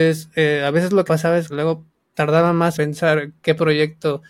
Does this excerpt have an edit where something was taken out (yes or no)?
yes